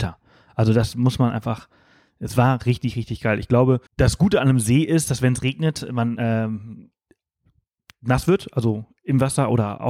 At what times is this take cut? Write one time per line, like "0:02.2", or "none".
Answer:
0:03.9